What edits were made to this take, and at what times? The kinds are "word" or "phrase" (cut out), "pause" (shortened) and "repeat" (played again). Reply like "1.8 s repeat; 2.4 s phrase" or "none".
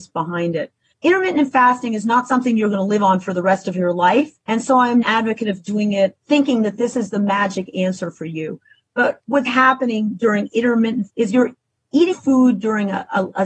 4.4 s pause; 5.0 s phrase; 6.2 s pause; 9.5 s word; 11.1 s word; 12.1 s word